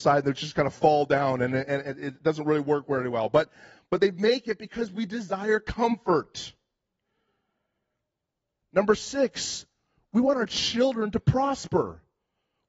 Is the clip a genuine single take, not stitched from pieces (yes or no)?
yes